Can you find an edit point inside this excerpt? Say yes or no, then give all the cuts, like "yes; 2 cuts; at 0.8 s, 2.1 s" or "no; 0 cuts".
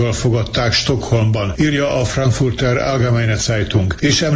no; 0 cuts